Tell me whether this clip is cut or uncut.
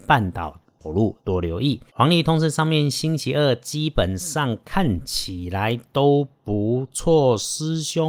cut